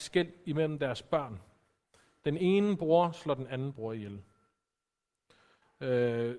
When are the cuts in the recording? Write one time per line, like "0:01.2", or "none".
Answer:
none